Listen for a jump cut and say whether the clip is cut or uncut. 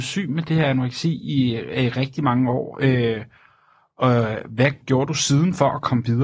uncut